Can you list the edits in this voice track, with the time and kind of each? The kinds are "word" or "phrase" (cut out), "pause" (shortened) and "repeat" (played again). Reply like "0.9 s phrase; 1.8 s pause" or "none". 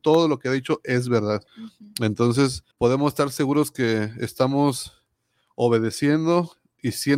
1.5 s pause; 2.7 s pause

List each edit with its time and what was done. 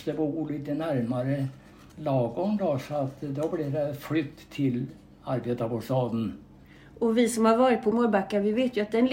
none

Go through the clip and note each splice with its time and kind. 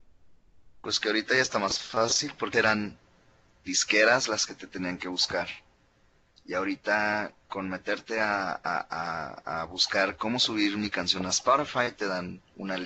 2.5 s word

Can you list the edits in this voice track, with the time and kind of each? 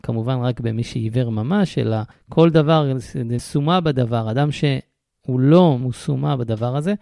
2.1 s pause; 3.4 s word; 5.8 s phrase

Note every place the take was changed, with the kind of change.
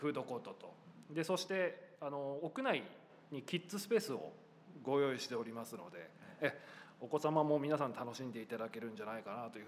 none

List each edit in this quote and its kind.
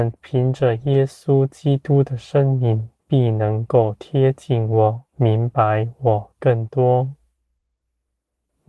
3.0 s pause; 5.1 s pause

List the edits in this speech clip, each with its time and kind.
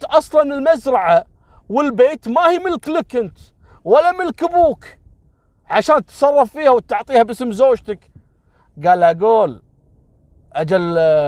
none

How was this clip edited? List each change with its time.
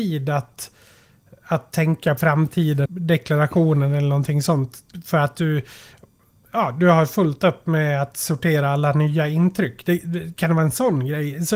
2.2 s word; 2.9 s word

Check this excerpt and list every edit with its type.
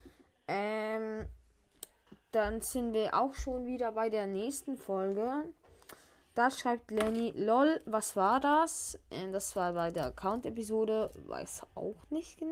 none

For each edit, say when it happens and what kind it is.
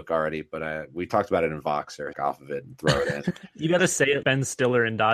2.1 s phrase; 3.8 s word; 4.2 s word

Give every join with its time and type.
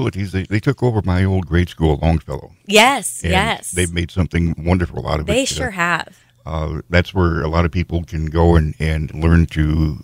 9.1 s word

